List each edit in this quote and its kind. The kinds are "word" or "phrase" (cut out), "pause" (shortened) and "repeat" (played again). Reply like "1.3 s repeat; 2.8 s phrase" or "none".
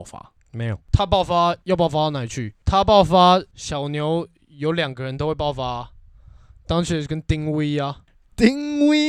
none